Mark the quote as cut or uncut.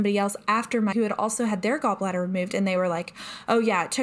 cut